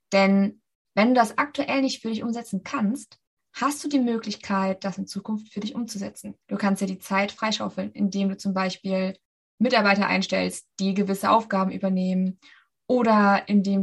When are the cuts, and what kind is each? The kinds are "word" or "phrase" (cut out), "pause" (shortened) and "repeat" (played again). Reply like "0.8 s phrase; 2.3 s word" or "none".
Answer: 6.4 s pause; 9.3 s pause